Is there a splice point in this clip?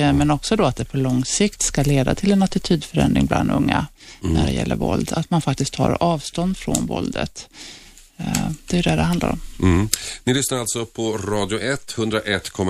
no; 0 cuts

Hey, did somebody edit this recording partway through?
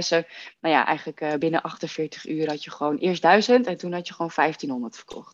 no; 0 cuts

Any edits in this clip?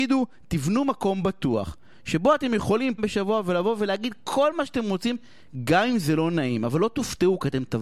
yes; 1 cut; at 3.0 s

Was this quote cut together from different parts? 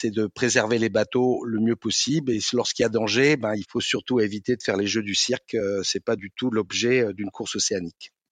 yes; 1 cut; at 3.6 s

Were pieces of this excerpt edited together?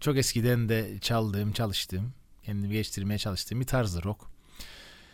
no; 0 cuts

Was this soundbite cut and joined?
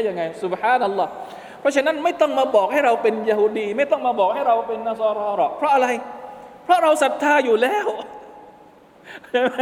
no; 0 cuts

